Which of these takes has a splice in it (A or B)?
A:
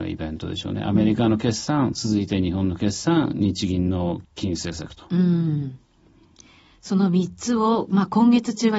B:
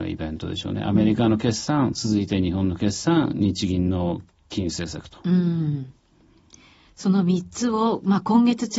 A